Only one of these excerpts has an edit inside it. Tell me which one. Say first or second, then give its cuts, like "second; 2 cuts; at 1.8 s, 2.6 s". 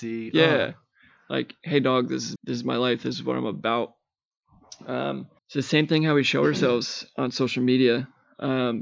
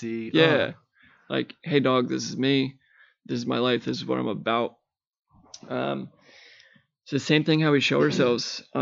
first; 2 cuts; at 2.4 s, 5.4 s